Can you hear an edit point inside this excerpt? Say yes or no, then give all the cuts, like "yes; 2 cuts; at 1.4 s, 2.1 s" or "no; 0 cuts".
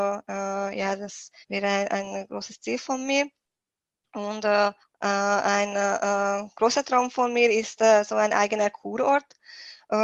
yes; 2 cuts; at 1.4 s, 4.8 s